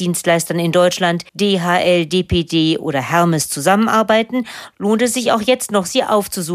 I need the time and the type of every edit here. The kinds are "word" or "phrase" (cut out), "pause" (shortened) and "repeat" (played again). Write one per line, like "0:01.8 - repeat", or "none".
0:01.3 - pause